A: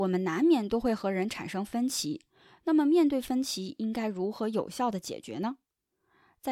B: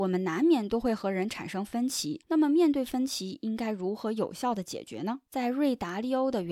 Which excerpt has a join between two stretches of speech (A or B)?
B